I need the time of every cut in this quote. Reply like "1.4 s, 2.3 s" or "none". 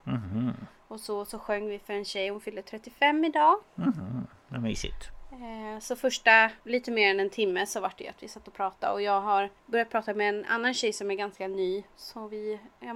6.6 s, 9.6 s